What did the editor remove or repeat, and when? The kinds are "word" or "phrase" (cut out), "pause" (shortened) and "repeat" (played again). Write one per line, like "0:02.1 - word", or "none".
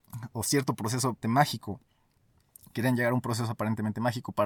0:01.2 - word